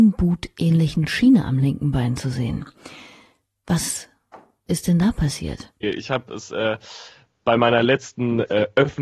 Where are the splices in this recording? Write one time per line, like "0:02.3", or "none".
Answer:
none